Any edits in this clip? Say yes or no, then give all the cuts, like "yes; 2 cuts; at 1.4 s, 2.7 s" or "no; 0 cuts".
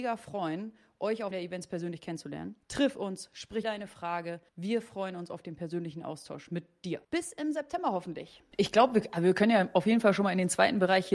yes; 6 cuts; at 1.3 s, 2.6 s, 3.6 s, 4.5 s, 7.0 s, 8.5 s